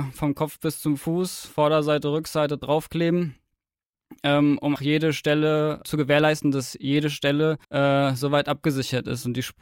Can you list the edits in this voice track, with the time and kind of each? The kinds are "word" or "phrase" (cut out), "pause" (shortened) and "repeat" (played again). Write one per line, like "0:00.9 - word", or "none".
0:04.8 - word
0:05.8 - word
0:07.6 - pause